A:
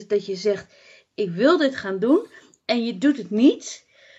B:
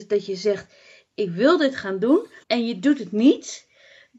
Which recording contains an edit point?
B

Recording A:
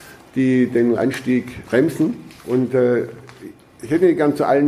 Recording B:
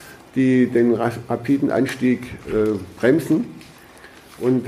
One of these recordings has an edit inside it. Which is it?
A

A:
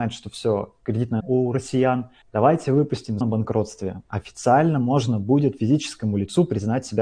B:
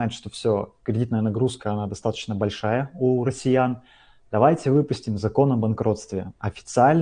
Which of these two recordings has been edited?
A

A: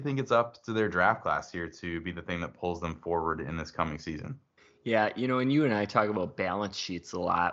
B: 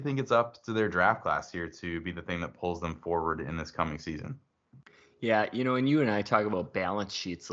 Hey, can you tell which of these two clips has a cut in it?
A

